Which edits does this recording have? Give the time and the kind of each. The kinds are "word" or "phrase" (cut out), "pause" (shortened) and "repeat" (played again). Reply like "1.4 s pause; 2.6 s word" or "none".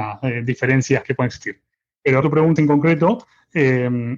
1.0 s word; 2.2 s word; 2.6 s word